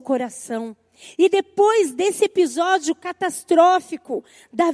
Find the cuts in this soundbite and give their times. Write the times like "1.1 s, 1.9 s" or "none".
none